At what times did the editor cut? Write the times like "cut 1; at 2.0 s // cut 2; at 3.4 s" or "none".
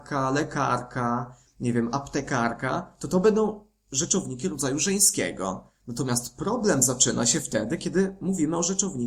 none